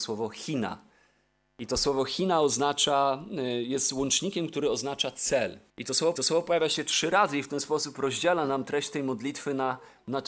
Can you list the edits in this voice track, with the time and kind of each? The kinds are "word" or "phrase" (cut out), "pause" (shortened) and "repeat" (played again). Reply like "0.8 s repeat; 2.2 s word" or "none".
5.7 s pause; 6.2 s repeat